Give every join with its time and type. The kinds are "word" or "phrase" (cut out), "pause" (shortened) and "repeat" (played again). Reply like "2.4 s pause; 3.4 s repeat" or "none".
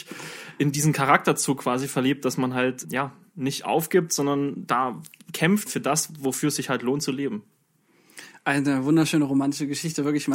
2.8 s word; 5.7 s word